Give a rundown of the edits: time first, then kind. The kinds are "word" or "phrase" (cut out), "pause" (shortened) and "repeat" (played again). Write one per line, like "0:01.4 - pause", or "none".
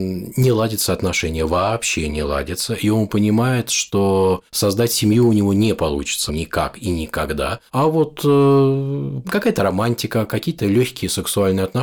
0:04.5 - pause
0:06.3 - word
0:07.7 - pause
0:09.2 - word